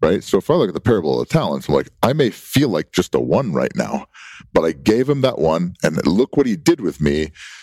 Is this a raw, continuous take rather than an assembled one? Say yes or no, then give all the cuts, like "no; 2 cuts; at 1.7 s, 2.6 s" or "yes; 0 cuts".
yes; 0 cuts